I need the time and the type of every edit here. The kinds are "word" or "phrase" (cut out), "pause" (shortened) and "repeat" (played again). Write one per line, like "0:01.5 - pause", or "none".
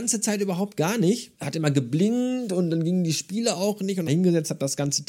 0:01.3 - pause
0:04.1 - phrase